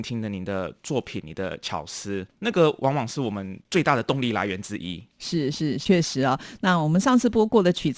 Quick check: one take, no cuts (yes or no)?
no